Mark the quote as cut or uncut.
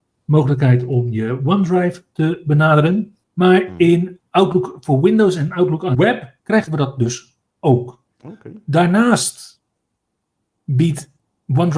cut